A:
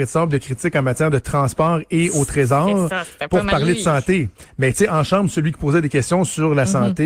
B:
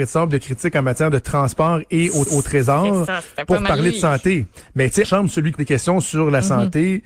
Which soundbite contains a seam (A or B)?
B